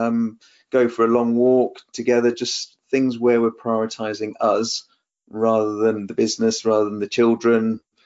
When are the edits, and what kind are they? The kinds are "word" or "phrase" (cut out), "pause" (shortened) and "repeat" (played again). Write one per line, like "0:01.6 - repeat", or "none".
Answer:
none